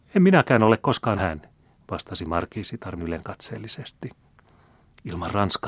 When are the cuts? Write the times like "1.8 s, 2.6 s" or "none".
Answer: 1.2 s, 3.0 s